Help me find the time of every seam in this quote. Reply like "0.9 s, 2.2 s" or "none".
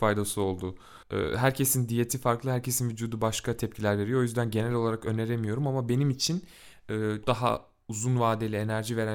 1.0 s, 7.2 s